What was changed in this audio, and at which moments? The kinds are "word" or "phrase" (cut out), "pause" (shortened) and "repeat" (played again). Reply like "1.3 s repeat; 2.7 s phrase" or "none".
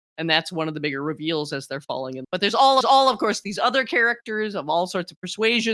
2.2 s word; 2.8 s repeat